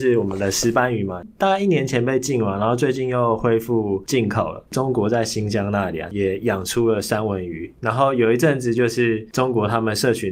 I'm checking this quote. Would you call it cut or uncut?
cut